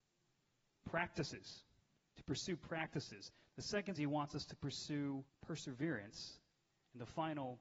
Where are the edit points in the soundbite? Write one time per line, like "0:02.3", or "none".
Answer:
0:01.8
0:04.0
0:05.3